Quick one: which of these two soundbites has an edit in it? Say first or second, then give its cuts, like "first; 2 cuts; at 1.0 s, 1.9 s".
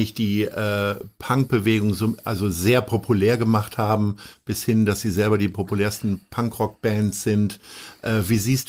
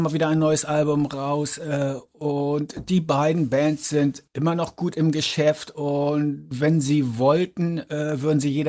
second; 1 cut; at 4.3 s